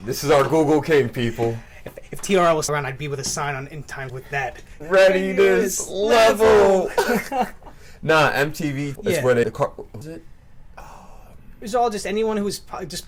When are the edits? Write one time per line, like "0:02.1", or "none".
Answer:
0:02.7
0:04.1
0:04.8
0:09.0
0:09.4
0:10.0